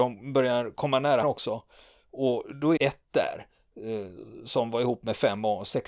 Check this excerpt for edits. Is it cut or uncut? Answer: cut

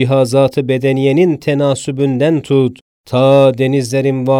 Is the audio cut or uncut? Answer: uncut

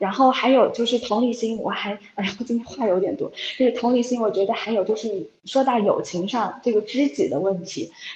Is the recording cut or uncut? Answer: cut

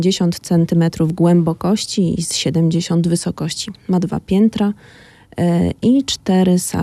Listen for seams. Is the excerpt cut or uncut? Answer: uncut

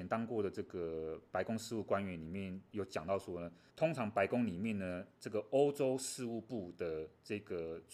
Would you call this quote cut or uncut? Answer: cut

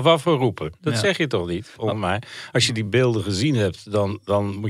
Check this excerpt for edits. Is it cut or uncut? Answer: uncut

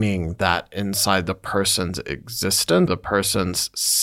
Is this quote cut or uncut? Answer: cut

